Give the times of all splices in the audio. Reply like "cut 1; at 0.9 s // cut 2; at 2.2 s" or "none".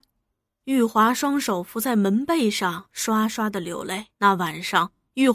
cut 1; at 4.1 s